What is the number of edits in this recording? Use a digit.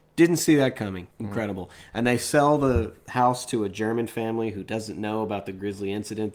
1